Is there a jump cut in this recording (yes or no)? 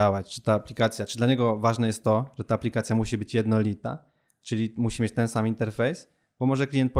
no